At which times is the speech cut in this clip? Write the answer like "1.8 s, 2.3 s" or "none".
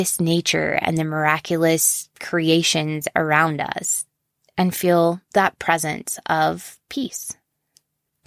none